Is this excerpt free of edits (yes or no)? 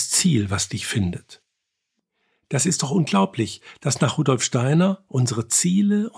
yes